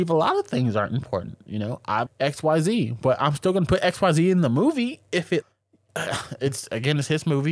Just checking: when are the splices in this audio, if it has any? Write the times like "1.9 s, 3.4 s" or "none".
2.1 s, 5.4 s